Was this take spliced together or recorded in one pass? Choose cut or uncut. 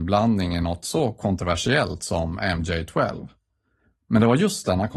uncut